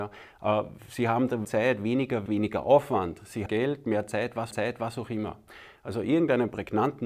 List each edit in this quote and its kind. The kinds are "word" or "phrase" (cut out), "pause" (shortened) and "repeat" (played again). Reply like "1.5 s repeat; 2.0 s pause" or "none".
1.4 s word; 2.3 s word; 3.5 s phrase; 4.5 s repeat

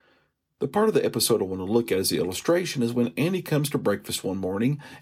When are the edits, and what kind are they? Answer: none

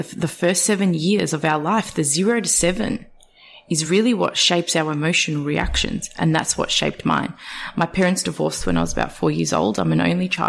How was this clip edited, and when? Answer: none

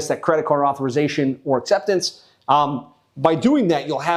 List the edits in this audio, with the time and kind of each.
none

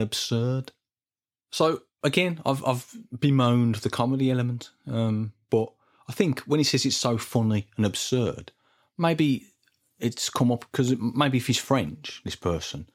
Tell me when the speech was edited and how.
none

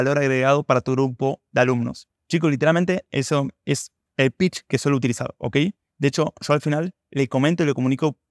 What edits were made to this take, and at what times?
none

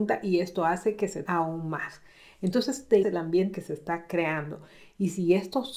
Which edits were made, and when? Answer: 1.2 s word; 3.0 s word; 3.5 s word

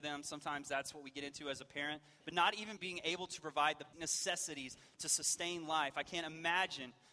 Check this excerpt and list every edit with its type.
2.8 s word; 3.9 s word

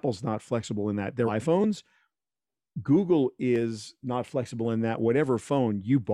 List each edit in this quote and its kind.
1.3 s word

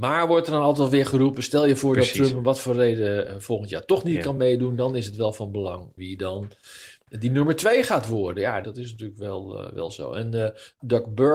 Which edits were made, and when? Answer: none

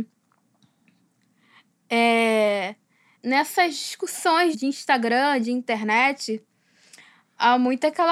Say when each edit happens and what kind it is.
3.2 s word; 4.5 s word

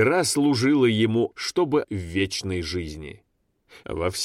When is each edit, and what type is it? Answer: 1.3 s word; 1.8 s word

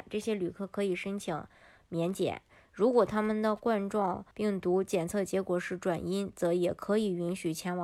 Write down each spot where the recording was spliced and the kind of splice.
4.3 s pause

